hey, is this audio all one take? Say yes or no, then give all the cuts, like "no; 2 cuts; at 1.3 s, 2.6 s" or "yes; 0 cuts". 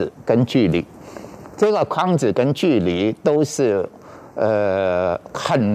yes; 0 cuts